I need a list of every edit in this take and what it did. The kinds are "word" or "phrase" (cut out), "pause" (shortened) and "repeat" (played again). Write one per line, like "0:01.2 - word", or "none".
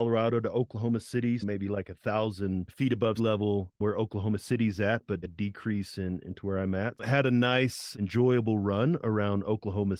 0:01.4 - word
0:03.2 - word
0:05.2 - word